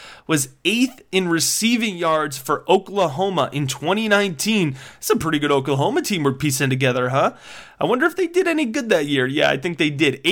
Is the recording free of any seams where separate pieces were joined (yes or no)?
yes